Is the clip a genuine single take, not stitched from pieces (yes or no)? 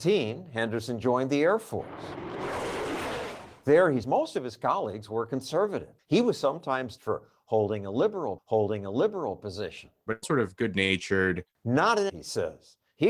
no